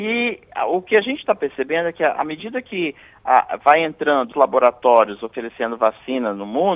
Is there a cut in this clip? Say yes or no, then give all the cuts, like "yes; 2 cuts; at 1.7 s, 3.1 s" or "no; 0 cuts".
yes; 1 cut; at 4.3 s